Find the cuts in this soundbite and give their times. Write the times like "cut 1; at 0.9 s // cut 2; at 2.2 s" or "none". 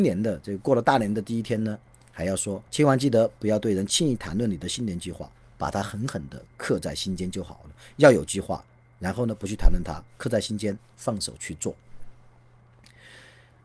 cut 1; at 2.7 s